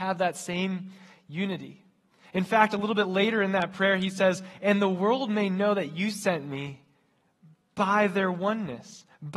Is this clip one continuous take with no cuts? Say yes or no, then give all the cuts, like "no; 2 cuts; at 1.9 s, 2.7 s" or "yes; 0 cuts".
yes; 0 cuts